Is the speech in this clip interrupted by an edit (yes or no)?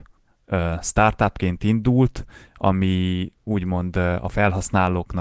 yes